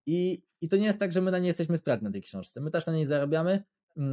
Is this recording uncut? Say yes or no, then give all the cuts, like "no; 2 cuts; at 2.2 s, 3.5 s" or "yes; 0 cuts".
yes; 0 cuts